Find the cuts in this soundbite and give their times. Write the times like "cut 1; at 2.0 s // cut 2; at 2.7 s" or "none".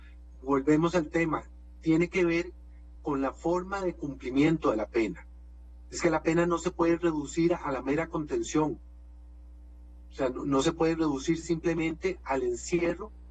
none